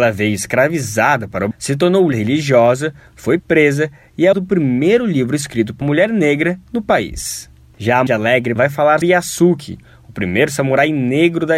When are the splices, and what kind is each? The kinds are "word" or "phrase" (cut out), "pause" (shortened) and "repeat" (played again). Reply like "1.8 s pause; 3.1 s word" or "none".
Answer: 1.5 s word; 2.1 s word; 3.4 s word; 4.3 s word; 5.8 s word; 8.1 s word; 8.6 s word; 9.0 s word